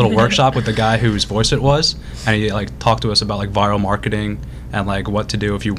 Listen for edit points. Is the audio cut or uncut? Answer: uncut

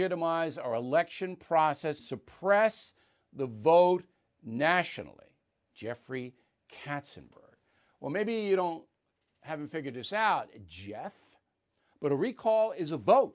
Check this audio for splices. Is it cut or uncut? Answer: cut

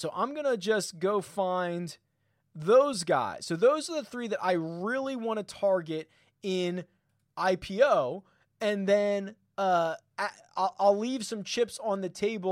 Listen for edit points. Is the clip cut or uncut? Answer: uncut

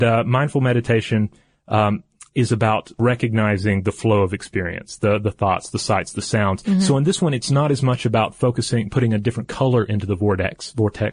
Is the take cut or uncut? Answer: uncut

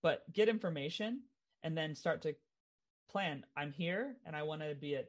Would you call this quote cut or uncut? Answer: uncut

